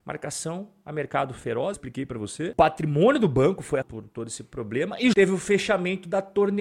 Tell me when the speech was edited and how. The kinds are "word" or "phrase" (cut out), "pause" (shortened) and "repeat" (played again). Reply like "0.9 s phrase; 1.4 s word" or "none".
1.7 s word; 3.8 s word; 5.1 s word